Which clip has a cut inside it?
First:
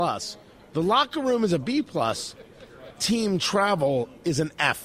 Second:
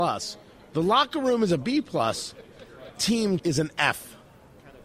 second; 1 cut; at 3.4 s

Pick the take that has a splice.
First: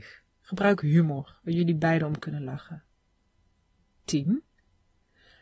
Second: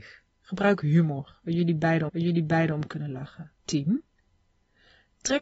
second; 2 cuts; at 2.1 s, 3.6 s

